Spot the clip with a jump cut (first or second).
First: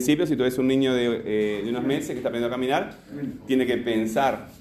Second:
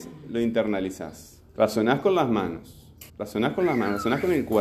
second